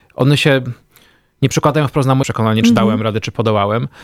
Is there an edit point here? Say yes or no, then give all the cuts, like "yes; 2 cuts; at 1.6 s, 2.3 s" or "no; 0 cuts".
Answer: yes; 1 cut; at 2.2 s